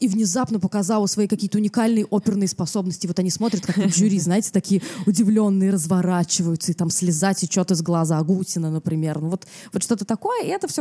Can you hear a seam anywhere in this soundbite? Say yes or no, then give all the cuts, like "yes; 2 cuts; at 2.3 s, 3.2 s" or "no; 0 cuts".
no; 0 cuts